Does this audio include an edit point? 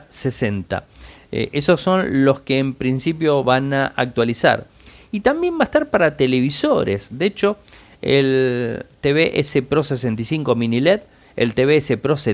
no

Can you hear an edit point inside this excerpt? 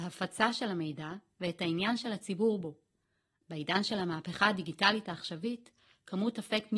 no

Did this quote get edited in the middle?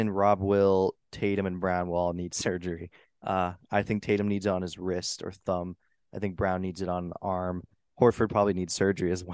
no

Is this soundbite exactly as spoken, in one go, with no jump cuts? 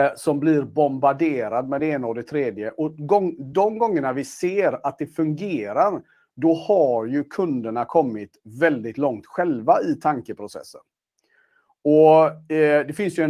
yes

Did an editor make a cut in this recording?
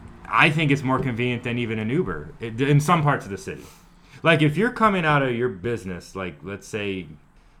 no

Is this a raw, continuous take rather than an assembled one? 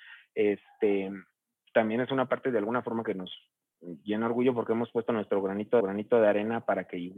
no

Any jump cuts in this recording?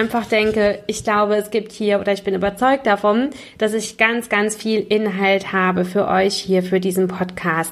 no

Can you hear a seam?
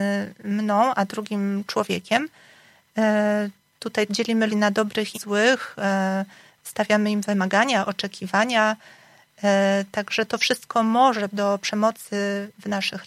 yes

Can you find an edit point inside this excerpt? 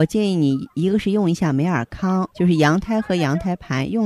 yes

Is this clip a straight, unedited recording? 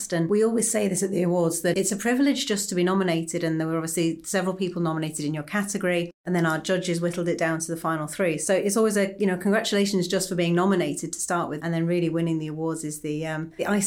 yes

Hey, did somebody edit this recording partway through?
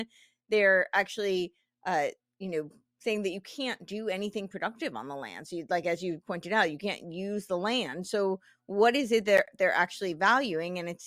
no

